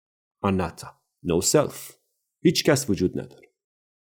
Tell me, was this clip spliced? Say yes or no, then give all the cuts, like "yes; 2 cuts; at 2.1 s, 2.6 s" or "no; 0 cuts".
no; 0 cuts